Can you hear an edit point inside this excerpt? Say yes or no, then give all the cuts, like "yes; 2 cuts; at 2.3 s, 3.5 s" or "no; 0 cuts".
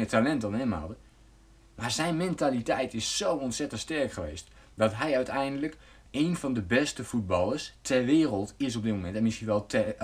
no; 0 cuts